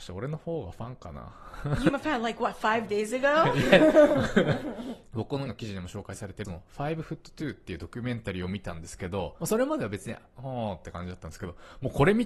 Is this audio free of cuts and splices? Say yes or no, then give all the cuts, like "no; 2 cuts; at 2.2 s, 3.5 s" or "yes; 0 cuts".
no; 3 cuts; at 1.9 s, 5.5 s, 6.4 s